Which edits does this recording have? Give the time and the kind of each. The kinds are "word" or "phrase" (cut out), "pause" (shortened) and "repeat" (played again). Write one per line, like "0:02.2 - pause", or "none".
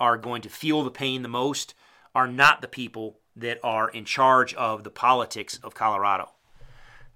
none